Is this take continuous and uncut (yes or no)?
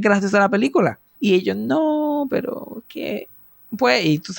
yes